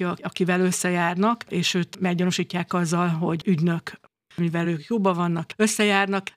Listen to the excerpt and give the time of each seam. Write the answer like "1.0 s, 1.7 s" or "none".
none